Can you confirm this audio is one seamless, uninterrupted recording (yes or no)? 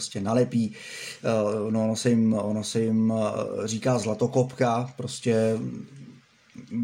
yes